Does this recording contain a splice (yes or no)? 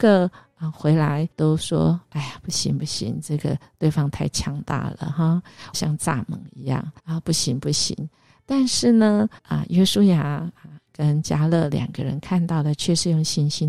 yes